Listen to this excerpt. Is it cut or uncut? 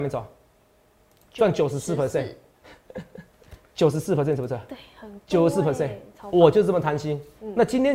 uncut